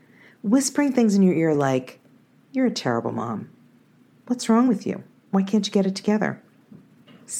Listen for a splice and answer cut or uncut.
uncut